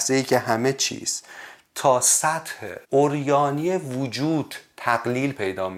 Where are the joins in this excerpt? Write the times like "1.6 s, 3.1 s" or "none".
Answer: 2.8 s